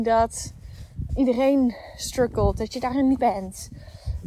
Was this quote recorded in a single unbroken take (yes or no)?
no